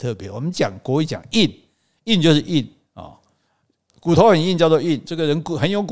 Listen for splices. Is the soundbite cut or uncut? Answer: uncut